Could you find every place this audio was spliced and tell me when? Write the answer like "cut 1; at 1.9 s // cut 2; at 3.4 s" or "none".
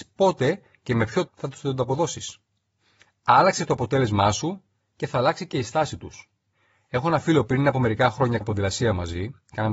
cut 1; at 1.3 s // cut 2; at 7.5 s // cut 3; at 8.4 s

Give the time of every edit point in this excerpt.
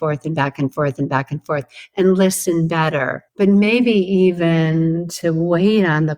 cut 1; at 3.3 s

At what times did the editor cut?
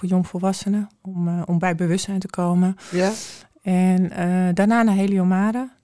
none

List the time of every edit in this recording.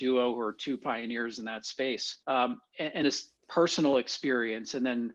cut 1; at 2.2 s // cut 2; at 3.0 s // cut 3; at 3.4 s

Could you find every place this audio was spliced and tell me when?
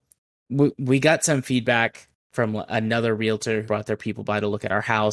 cut 1; at 3.6 s

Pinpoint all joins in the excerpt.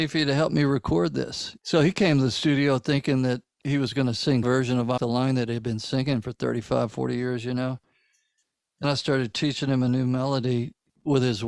cut 1; at 1.6 s // cut 2; at 4.4 s // cut 3; at 5.0 s // cut 4; at 8.8 s

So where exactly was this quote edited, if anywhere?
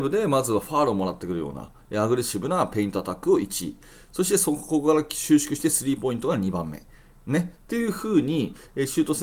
none

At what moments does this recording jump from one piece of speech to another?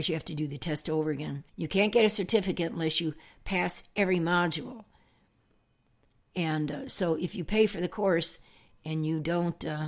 cut 1; at 1.5 s

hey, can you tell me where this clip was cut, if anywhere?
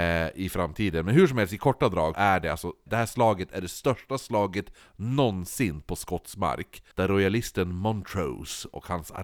cut 1; at 2.1 s // cut 2; at 2.9 s // cut 3; at 6.9 s

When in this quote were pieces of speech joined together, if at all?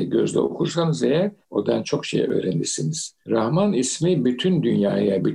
cut 1; at 1.4 s // cut 2; at 3.2 s

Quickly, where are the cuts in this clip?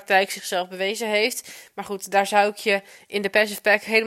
none

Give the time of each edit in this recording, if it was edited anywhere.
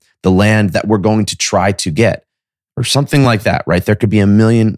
none

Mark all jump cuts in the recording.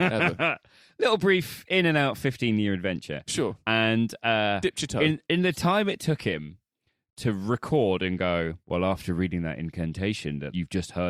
cut 1; at 5.2 s // cut 2; at 8.6 s

